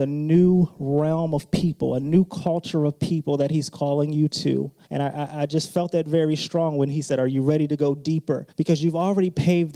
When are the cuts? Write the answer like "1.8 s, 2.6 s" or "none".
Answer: 4.8 s, 8.5 s